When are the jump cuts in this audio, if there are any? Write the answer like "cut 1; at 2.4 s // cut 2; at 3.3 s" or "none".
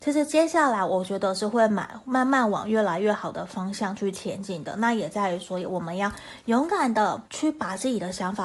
cut 1; at 7.3 s